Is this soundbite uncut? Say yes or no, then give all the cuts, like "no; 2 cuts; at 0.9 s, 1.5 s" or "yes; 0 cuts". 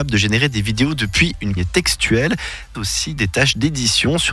no; 3 cuts; at 1.6 s, 2.7 s, 3.2 s